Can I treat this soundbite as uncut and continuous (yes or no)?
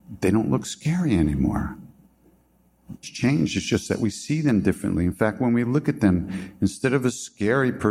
no